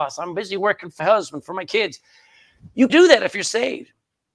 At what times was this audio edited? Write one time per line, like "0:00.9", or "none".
0:01.0
0:02.9